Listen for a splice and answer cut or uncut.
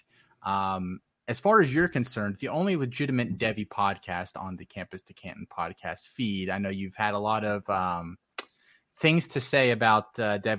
uncut